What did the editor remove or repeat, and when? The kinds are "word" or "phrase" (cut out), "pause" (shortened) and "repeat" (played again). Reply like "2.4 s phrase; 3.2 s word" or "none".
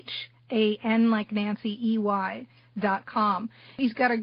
none